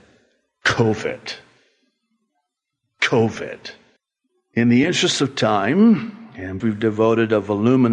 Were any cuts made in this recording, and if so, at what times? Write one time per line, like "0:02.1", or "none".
0:04.0
0:06.6